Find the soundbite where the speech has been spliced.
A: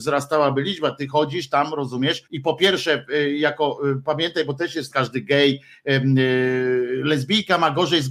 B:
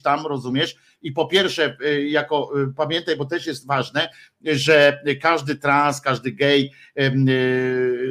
A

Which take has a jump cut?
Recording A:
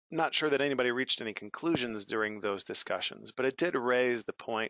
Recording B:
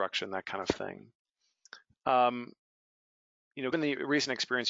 B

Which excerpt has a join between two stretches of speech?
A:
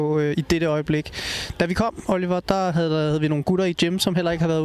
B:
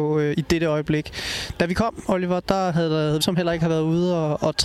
B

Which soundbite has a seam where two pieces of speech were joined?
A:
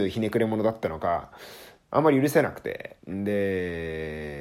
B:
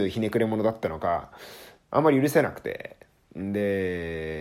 A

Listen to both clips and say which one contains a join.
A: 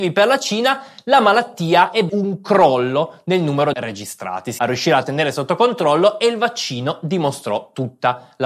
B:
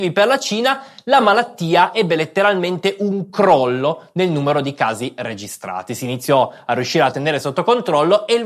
A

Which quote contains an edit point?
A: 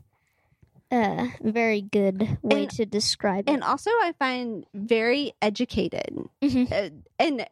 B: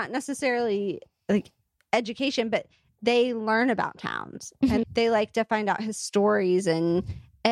B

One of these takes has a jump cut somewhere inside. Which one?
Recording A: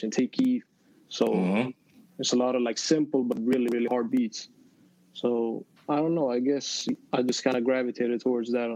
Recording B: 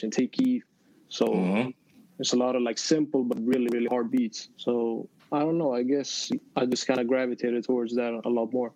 B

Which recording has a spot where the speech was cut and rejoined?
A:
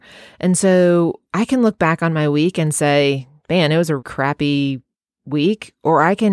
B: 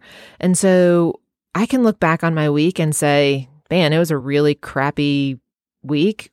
A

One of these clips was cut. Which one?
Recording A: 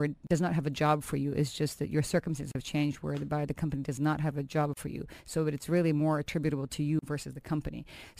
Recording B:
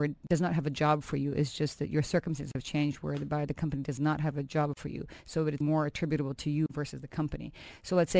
B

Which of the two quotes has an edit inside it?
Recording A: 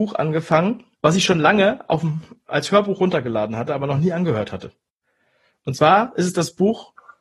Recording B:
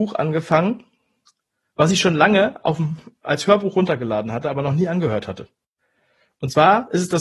A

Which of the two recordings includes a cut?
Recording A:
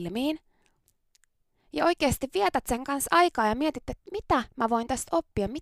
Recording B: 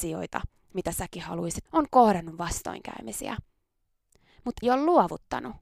B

